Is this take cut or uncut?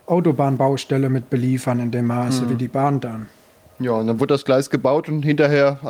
uncut